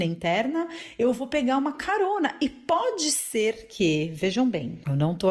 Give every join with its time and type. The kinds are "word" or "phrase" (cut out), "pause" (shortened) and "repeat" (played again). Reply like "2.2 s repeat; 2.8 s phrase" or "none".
none